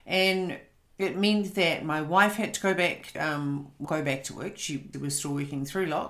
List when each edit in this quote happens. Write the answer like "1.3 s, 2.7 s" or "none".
3.1 s, 3.8 s, 4.9 s